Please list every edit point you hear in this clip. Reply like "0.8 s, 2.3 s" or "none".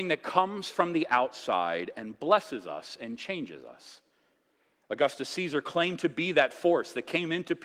none